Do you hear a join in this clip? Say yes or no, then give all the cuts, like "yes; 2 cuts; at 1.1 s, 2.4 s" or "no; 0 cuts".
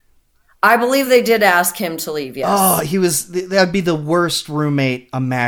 no; 0 cuts